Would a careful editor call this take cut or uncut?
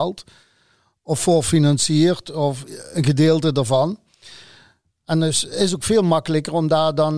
uncut